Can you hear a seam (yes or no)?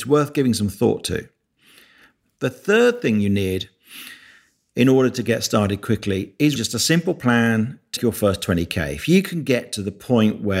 yes